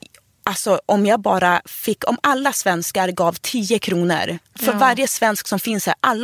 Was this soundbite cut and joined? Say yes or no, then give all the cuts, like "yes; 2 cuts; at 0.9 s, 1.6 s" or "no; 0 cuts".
no; 0 cuts